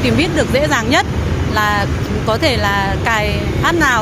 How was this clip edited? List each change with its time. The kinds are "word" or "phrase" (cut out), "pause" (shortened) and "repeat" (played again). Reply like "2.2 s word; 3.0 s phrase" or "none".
none